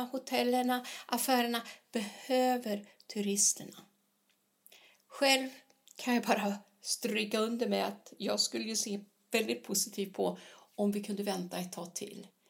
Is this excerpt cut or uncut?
uncut